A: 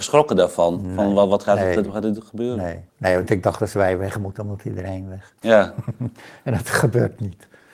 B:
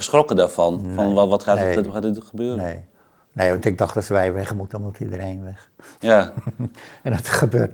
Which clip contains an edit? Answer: A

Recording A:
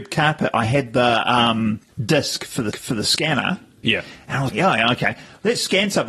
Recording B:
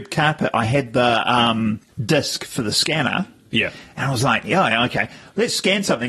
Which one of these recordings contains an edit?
A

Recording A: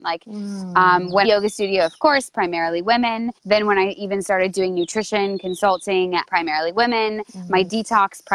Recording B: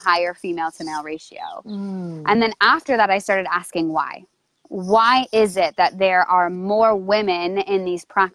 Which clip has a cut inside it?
A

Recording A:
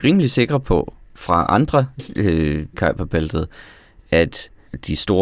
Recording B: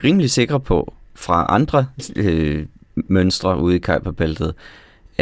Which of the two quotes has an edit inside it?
A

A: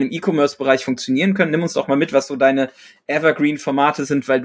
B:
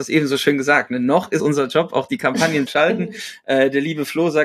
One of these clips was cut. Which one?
B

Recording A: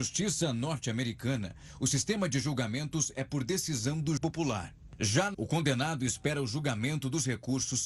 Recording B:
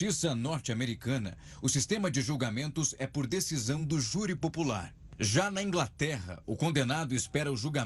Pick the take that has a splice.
A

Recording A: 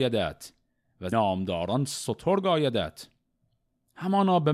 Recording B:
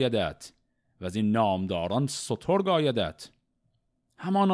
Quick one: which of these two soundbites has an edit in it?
A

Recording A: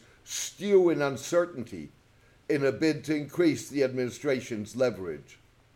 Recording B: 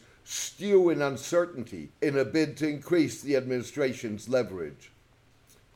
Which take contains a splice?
B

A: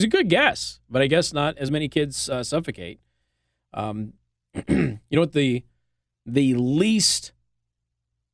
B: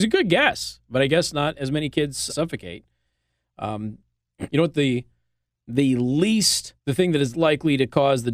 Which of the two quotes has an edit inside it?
B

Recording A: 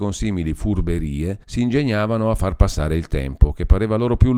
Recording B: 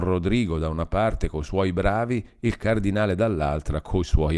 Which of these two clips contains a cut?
A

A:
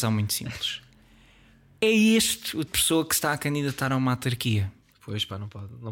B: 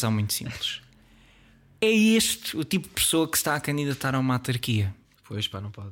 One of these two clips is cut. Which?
A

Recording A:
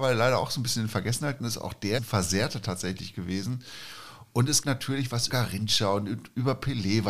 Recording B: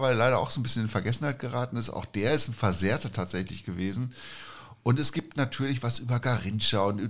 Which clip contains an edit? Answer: A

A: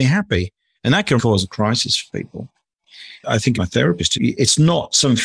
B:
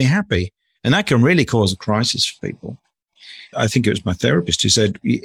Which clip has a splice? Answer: A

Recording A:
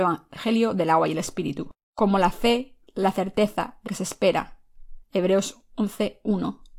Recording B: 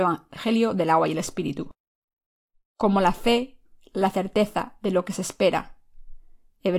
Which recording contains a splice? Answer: A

